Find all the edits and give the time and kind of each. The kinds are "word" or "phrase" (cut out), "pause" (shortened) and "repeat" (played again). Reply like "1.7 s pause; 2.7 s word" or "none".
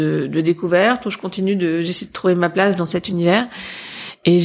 none